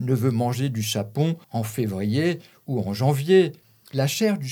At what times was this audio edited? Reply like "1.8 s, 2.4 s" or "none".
1.4 s, 3.6 s